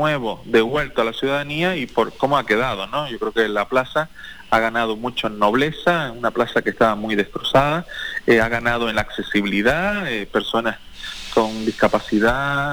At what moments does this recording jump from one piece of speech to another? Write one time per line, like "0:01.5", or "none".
none